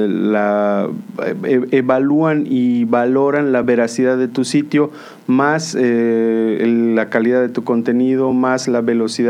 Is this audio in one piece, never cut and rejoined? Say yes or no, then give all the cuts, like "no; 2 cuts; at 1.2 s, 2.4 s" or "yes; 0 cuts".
yes; 0 cuts